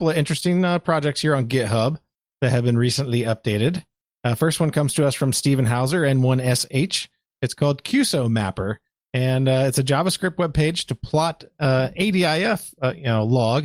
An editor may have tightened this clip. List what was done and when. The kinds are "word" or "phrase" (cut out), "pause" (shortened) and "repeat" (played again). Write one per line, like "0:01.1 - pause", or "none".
none